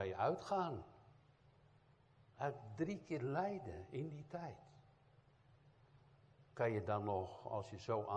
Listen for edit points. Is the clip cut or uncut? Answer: uncut